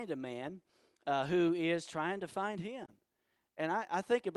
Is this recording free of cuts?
yes; 0 cuts

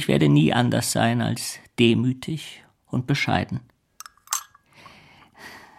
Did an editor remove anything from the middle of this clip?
no; 0 cuts

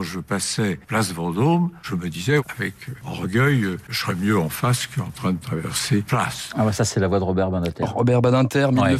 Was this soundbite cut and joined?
yes; 1 cut; at 6.1 s

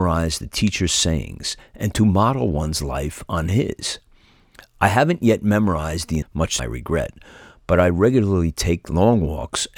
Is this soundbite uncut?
no; 2 cuts; at 6.2 s, 6.6 s

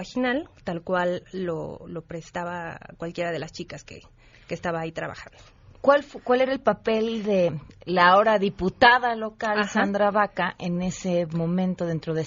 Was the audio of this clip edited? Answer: no; 0 cuts

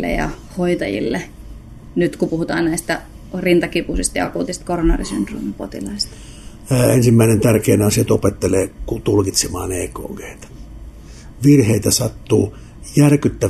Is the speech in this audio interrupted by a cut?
no; 0 cuts

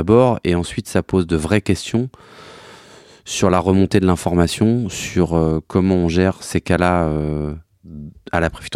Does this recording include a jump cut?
no; 0 cuts

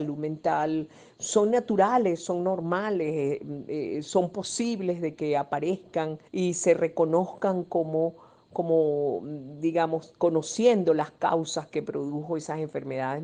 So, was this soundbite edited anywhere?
yes; 1 cut; at 6.3 s

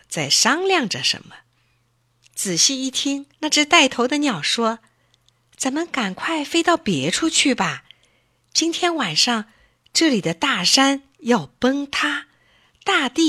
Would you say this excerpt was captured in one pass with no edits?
no; 1 cut; at 3.3 s

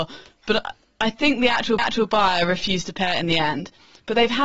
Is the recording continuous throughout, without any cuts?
no; 1 cut; at 1.8 s

